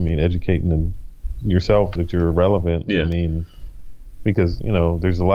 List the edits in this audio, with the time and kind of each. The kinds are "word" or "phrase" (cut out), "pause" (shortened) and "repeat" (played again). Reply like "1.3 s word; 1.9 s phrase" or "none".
2.0 s word